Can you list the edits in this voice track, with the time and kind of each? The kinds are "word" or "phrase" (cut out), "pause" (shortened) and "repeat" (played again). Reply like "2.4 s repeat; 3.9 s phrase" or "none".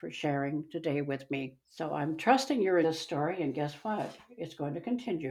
1.6 s pause; 2.8 s word